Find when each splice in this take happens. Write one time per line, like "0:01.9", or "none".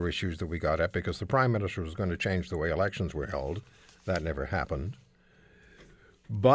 none